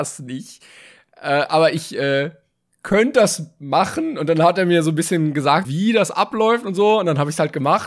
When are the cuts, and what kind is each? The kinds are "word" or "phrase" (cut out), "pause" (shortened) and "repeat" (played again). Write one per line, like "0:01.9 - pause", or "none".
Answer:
0:05.6 - word